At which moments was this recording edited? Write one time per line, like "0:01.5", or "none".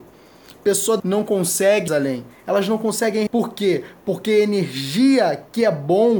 0:01.0
0:01.9
0:03.3